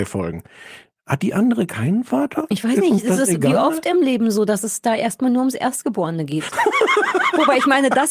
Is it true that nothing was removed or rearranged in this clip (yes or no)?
yes